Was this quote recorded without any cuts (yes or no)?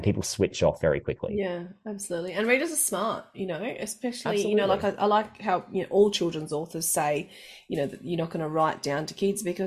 yes